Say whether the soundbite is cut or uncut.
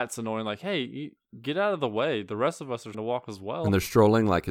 cut